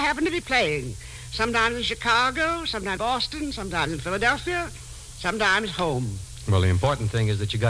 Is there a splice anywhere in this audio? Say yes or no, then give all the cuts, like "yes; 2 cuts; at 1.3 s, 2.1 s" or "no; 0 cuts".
yes; 1 cut; at 3.0 s